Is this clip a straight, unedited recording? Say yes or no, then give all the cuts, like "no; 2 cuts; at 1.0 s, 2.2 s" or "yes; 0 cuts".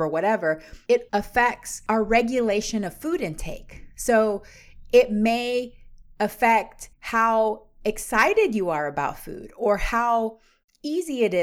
no; 2 cuts; at 1.1 s, 6.9 s